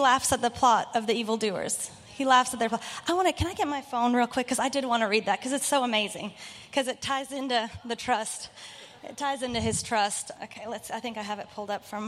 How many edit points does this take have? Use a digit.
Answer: 1